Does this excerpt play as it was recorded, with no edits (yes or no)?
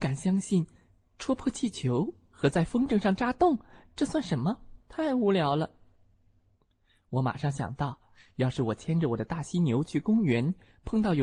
no